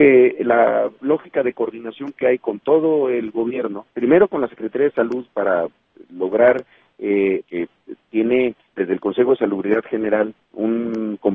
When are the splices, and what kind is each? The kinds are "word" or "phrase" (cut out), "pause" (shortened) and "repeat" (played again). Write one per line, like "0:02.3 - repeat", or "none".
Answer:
0:03.9 - pause
0:07.4 - phrase
0:08.7 - word